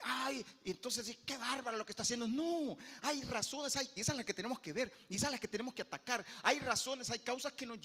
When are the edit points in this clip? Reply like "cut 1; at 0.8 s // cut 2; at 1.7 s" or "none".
cut 1; at 4.0 s